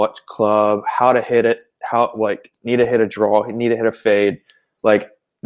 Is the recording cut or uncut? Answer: uncut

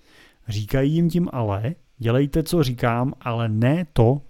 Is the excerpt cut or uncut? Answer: cut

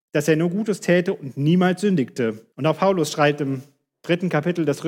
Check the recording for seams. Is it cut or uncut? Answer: cut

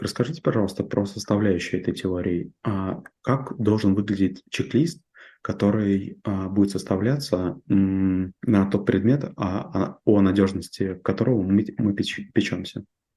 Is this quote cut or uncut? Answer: cut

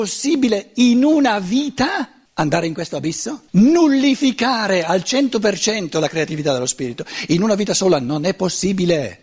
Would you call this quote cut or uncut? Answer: cut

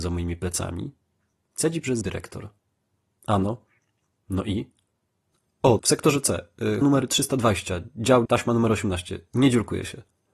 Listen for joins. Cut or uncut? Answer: cut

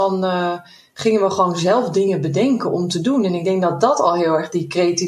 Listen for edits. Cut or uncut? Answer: uncut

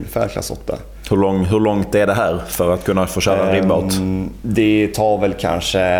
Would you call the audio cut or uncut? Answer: uncut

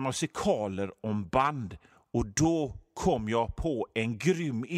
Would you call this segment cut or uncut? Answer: uncut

